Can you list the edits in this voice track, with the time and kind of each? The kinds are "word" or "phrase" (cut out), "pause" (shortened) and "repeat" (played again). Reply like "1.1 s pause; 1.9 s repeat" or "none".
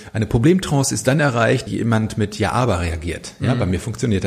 1.7 s word